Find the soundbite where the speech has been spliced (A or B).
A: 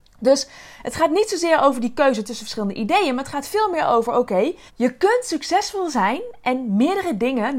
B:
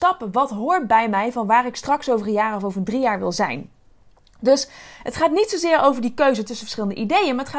A